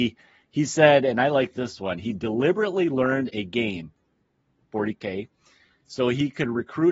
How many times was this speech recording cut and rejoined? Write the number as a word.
zero